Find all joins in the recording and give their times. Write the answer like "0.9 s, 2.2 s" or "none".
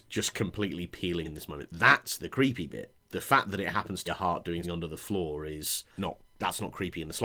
1.2 s, 4.1 s, 4.6 s, 6.0 s